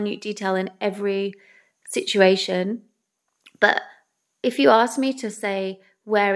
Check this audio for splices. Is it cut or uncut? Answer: uncut